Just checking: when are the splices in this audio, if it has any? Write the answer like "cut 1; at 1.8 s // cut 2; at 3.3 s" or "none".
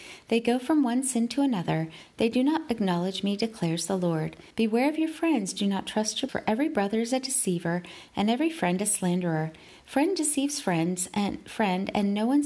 cut 1; at 4.5 s // cut 2; at 6.3 s